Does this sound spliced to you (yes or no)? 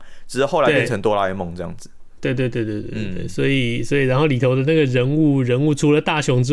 no